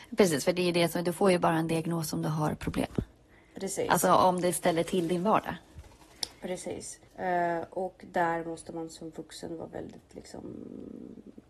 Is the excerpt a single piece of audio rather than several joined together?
no; 1 cut; at 7.1 s

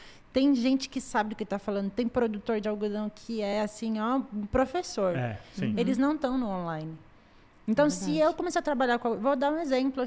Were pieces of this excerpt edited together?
no; 0 cuts

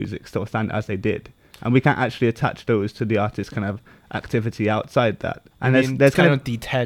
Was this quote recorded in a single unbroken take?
no; 1 cut; at 5.5 s

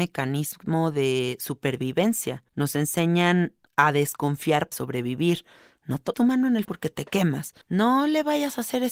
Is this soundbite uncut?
no; 6 cuts; at 2.5 s, 3.6 s, 4.7 s, 6.1 s, 6.6 s, 7.6 s

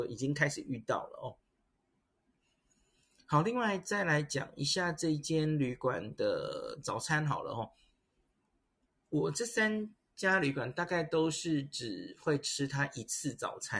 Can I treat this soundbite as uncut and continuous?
yes; 0 cuts

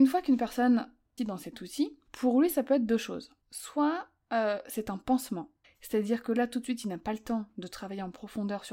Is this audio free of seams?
no; 4 cuts; at 1.2 s, 2.1 s, 3.4 s, 5.6 s

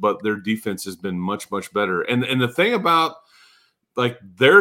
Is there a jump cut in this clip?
no; 0 cuts

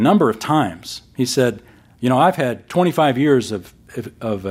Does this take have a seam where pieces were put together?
no; 0 cuts

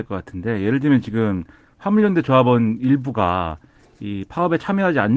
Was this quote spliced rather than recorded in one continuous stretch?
no; 0 cuts

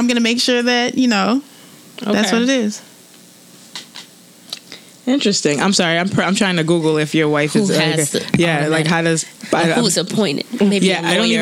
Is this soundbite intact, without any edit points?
yes; 0 cuts

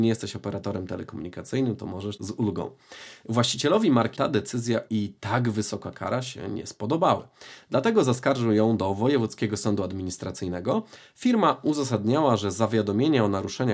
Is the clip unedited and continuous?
no; 3 cuts; at 2.2 s, 4.1 s, 4.9 s

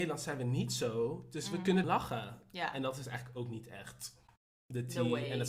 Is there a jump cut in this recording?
yes; 1 cut; at 1.8 s

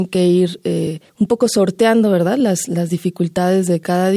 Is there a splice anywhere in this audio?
yes; 1 cut; at 1.1 s

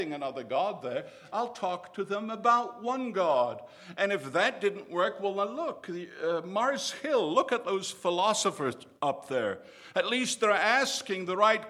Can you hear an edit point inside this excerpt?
yes; 1 cut; at 9.0 s

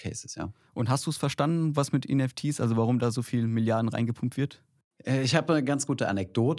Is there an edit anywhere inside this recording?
no; 0 cuts

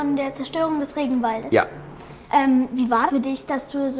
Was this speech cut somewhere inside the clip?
yes; 2 cuts; at 2.3 s, 3.1 s

